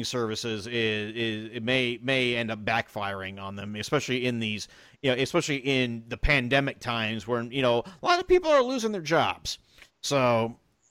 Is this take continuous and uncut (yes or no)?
yes